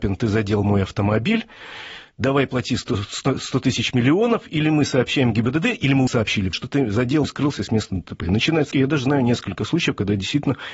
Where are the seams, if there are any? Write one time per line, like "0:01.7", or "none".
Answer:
0:02.1
0:06.1
0:06.5
0:07.2
0:08.7